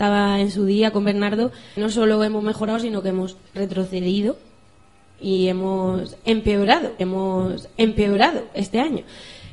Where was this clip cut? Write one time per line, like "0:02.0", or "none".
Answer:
0:01.8
0:03.5
0:07.0